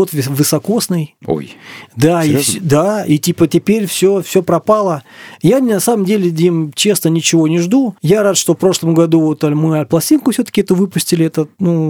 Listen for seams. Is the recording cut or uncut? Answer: cut